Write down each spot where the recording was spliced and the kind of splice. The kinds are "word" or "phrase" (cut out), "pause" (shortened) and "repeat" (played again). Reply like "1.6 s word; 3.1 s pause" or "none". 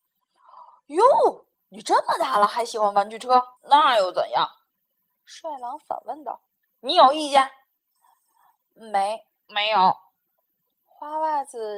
3.6 s pause; 6.5 s pause

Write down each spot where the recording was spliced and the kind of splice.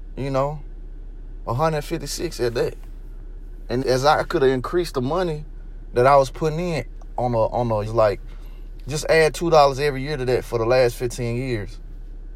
3.8 s word; 7.8 s phrase

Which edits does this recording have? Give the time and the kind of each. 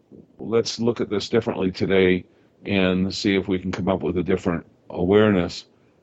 none

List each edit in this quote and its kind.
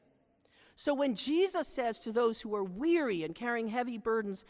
none

